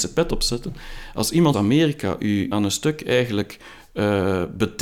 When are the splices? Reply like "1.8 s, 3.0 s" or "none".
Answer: 1.5 s, 2.5 s